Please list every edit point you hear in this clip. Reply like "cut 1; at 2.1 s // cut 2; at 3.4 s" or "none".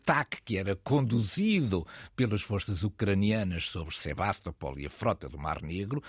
none

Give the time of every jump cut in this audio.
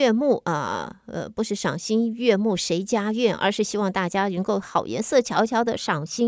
none

